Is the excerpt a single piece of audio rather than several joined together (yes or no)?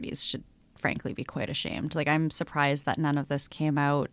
yes